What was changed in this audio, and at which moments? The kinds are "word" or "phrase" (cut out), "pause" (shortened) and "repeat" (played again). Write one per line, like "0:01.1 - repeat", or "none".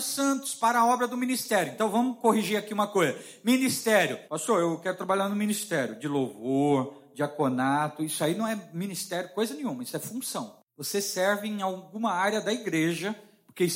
0:04.3 - pause
0:10.7 - pause